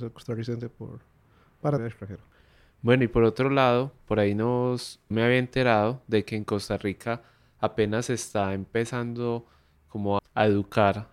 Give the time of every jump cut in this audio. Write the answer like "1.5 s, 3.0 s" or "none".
1.8 s, 5.1 s, 10.2 s